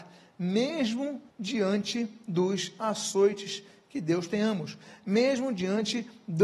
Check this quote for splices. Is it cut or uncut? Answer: cut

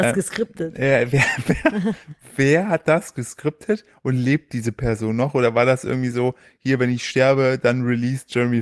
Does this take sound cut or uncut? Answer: uncut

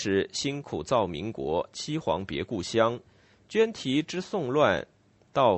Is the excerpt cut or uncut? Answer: uncut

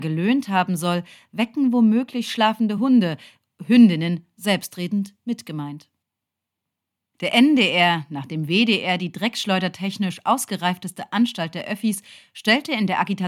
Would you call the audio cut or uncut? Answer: uncut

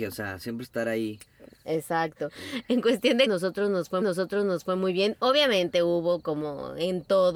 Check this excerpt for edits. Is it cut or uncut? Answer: cut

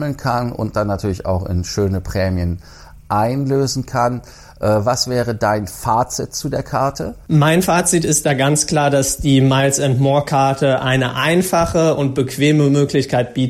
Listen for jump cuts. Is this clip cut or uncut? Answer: uncut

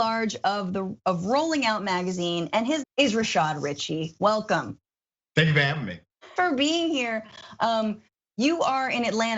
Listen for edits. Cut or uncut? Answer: cut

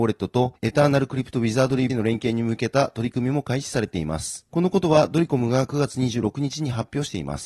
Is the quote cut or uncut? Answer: cut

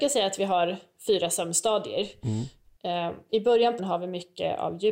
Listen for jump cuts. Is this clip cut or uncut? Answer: cut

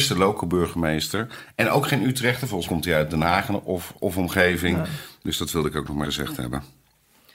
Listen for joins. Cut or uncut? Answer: cut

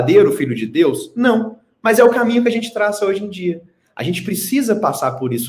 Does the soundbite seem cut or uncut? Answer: uncut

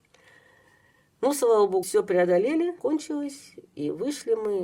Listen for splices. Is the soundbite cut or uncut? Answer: cut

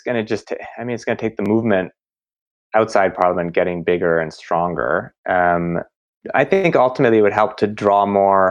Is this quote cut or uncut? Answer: uncut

